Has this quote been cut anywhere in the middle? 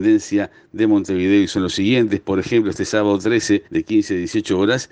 yes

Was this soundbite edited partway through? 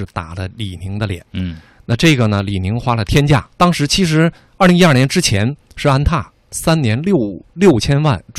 yes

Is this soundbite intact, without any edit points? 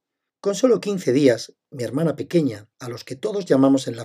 no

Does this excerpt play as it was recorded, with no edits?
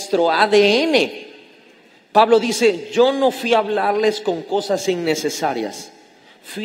no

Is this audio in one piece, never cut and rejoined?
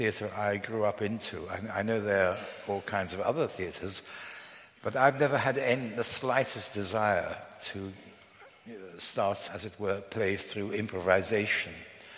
no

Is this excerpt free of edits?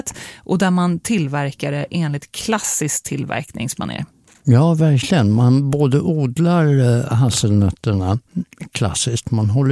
yes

